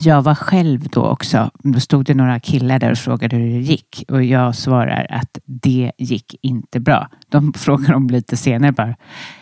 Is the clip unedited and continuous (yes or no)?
yes